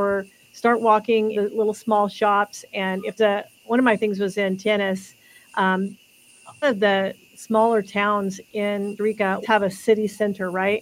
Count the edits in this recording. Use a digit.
7